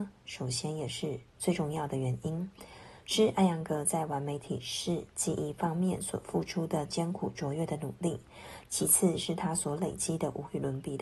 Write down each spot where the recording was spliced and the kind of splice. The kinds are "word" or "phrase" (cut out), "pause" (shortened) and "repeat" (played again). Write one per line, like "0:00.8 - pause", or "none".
0:01.3 - pause

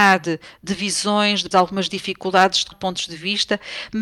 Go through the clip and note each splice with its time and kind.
0:01.5 - word
0:02.7 - word

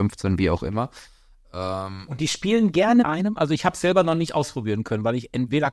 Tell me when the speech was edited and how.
0:03.0 - word

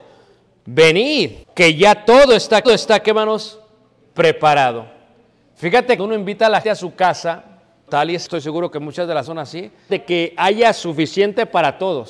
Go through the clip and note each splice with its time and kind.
0:01.4 - pause
0:02.6 - repeat
0:06.0 - phrase
0:06.6 - word
0:07.9 - word
0:08.3 - phrase
0:09.2 - word
0:09.9 - phrase

